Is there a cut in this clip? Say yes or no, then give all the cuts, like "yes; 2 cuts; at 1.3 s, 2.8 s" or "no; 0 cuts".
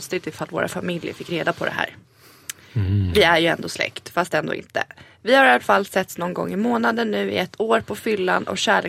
no; 0 cuts